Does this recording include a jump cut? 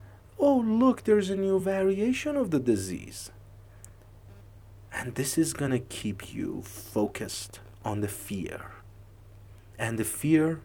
no; 0 cuts

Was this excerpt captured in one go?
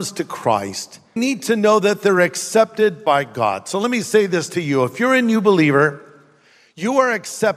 no; 1 cut; at 1.2 s

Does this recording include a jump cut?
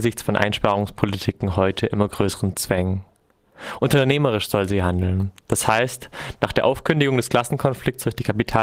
no; 0 cuts

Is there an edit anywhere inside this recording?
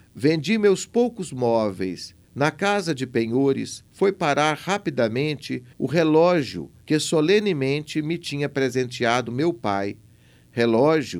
yes; 4 cuts; at 2.2 s, 3.9 s, 5.7 s, 6.8 s

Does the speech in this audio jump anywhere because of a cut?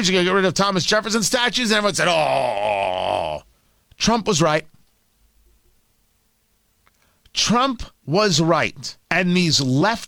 yes; 3 cuts; at 3.5 s, 8.0 s, 9.0 s

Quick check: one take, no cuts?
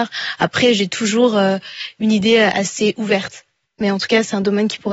no; 1 cut; at 3.6 s

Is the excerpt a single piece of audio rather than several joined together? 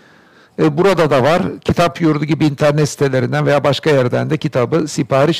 yes; 0 cuts

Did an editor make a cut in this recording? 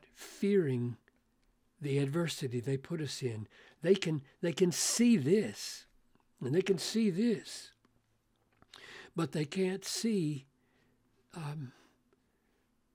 no; 0 cuts

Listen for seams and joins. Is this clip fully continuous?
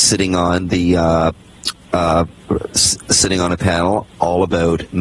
yes; 0 cuts

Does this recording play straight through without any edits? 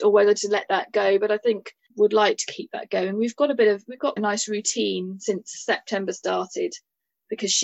no; 2 cuts; at 1.9 s, 4.2 s

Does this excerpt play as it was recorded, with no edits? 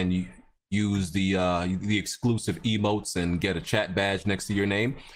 yes; 0 cuts

